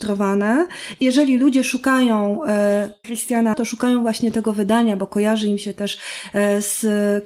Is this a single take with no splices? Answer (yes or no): no